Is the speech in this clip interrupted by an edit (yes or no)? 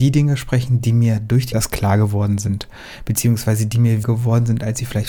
yes